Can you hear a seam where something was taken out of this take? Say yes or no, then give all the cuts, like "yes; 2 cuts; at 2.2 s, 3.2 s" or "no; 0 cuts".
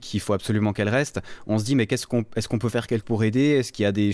yes; 1 cut; at 3.0 s